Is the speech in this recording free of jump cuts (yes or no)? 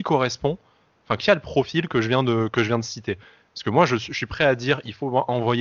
yes